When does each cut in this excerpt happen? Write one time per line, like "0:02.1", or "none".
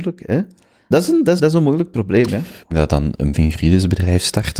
0:00.9
0:01.4
0:02.7
0:03.3